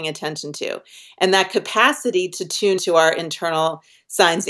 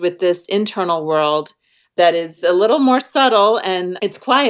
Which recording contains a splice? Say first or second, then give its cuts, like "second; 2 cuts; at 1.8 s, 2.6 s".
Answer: first; 1 cut; at 2.8 s